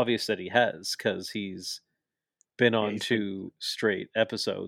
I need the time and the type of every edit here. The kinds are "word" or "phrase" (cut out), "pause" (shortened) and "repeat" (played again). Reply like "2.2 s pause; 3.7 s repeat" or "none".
none